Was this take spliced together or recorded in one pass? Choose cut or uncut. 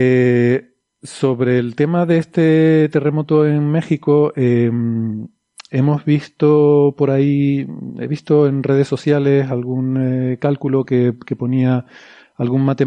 uncut